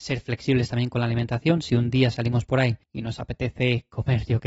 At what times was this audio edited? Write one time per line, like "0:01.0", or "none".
0:02.8